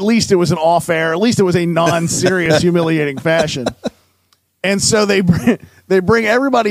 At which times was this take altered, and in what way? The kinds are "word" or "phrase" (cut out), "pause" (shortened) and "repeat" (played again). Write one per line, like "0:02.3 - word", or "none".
none